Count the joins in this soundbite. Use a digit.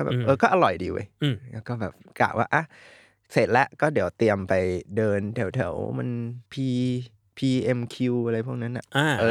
1